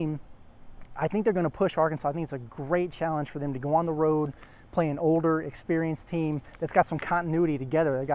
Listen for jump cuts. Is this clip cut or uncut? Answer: uncut